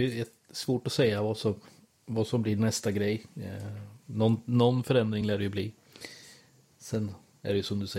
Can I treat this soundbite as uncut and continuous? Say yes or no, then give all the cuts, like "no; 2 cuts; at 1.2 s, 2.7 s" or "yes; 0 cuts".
yes; 0 cuts